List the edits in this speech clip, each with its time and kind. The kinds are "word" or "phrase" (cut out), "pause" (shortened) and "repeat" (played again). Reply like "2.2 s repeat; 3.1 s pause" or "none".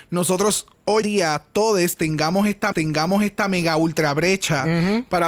1.0 s word; 2.7 s repeat